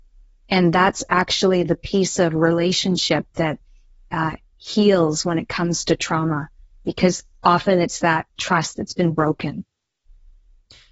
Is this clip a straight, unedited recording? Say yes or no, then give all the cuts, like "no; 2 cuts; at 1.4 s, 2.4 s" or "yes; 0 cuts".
yes; 0 cuts